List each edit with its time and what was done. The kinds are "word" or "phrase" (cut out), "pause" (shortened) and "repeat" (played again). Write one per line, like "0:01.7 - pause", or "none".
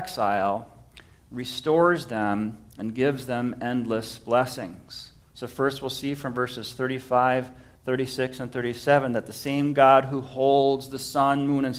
none